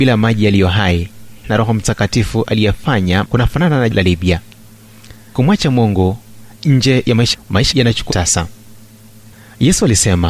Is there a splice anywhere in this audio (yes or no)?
yes